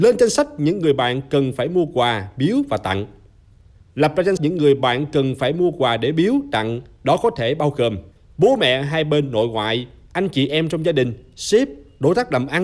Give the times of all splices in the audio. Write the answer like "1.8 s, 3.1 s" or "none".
4.4 s